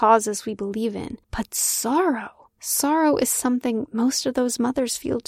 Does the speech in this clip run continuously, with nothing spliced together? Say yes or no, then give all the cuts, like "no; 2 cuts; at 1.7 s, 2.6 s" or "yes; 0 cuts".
no; 2 cuts; at 1.2 s, 2.5 s